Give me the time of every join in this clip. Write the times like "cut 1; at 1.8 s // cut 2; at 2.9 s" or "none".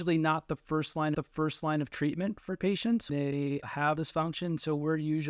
cut 1; at 1.1 s // cut 2; at 3.1 s // cut 3; at 4.0 s